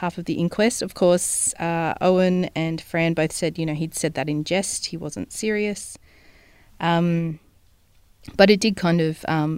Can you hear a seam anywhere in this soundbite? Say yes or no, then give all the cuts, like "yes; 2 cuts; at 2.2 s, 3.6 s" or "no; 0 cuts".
no; 0 cuts